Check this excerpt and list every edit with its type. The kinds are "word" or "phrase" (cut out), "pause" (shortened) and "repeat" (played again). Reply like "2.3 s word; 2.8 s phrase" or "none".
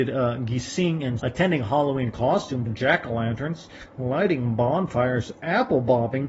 1.2 s word; 2.7 s phrase